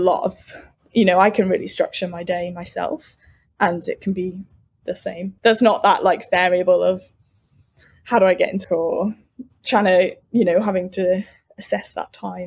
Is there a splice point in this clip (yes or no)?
yes